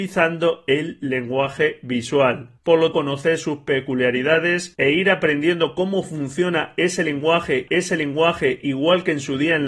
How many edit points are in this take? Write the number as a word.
three